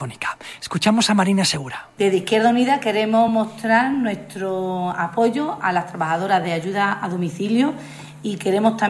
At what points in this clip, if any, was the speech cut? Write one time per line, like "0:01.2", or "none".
none